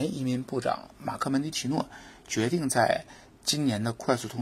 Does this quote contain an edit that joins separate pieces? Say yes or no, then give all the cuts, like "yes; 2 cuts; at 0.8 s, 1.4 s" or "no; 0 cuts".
no; 0 cuts